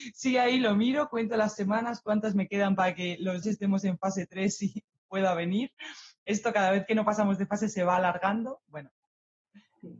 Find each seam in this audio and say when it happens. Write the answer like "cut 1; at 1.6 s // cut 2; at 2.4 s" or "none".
cut 1; at 3.4 s